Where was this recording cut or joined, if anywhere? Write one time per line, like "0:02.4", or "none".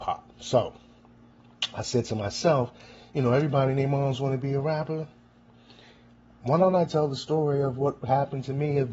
0:06.9